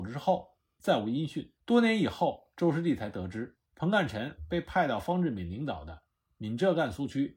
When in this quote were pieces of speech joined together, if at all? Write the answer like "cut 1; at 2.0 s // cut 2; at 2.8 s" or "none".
cut 1; at 1.6 s // cut 2; at 3.7 s

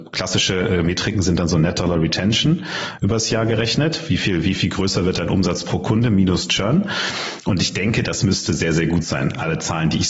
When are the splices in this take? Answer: none

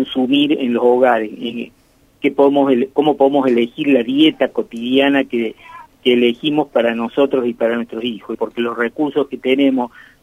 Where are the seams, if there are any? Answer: cut 1; at 5.9 s // cut 2; at 8.3 s

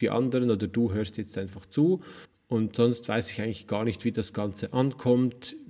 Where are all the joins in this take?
cut 1; at 2.2 s

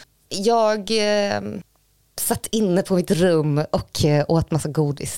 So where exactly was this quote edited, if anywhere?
none

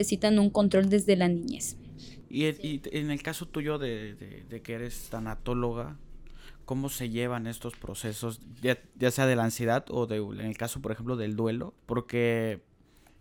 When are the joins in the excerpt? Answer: cut 1; at 11.8 s

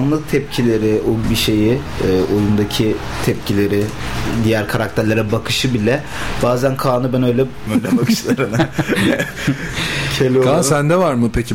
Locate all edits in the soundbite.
cut 1; at 1.2 s // cut 2; at 7.7 s

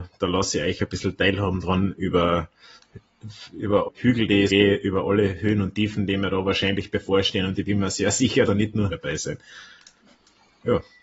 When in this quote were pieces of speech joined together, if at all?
cut 1; at 3.8 s // cut 2; at 4.5 s // cut 3; at 8.4 s // cut 4; at 8.9 s

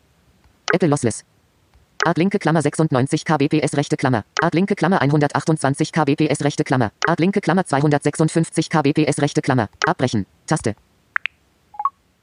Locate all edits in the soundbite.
cut 1; at 4.3 s // cut 2; at 7.0 s // cut 3; at 9.7 s

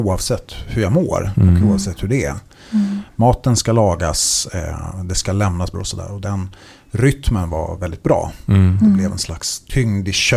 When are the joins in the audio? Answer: cut 1; at 5.7 s

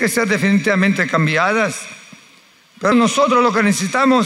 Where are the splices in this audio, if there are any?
cut 1; at 2.9 s

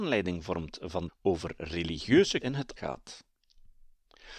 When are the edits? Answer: cut 1; at 1.1 s // cut 2; at 2.4 s // cut 3; at 2.8 s

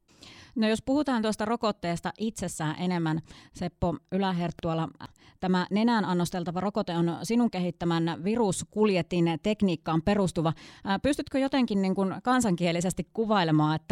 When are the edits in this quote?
none

